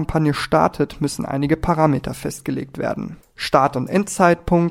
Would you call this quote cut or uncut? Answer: cut